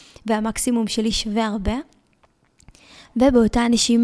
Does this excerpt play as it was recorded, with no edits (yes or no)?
yes